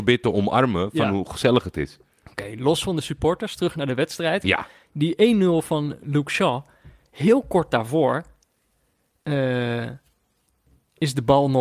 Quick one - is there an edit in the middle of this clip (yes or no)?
no